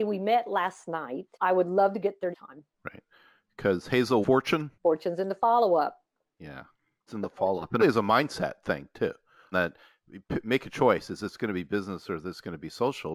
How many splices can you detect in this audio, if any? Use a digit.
8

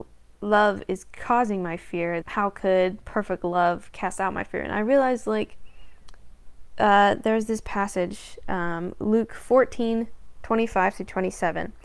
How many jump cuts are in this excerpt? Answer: 1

